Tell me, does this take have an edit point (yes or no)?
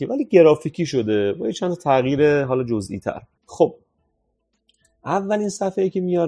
yes